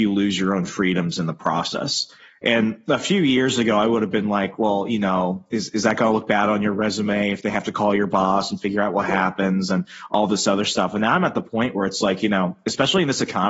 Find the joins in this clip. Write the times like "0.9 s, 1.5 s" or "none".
none